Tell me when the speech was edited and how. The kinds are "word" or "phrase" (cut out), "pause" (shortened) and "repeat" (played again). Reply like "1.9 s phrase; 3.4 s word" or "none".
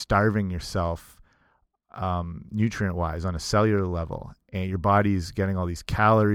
none